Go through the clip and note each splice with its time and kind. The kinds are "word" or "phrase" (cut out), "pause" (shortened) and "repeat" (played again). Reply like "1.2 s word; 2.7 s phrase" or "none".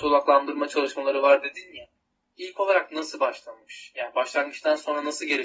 none